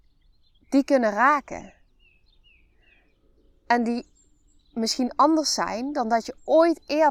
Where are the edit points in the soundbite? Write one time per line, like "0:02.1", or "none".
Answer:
none